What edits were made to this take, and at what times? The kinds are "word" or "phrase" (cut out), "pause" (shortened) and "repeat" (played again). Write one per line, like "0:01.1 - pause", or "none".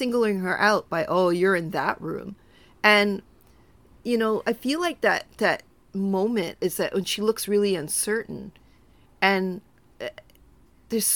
none

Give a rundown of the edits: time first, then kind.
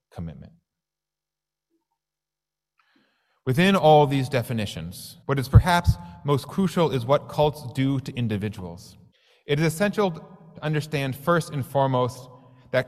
0:05.2 - pause
0:09.1 - pause

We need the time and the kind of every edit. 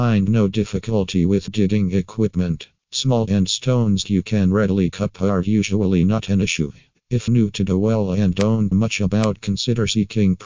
0:01.5 - word
0:03.3 - word
0:04.0 - word
0:04.9 - word
0:07.3 - word
0:07.7 - word
0:08.7 - word
0:09.4 - word

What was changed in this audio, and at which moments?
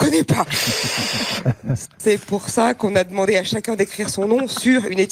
none

